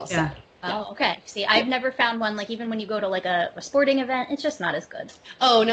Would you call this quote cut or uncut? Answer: uncut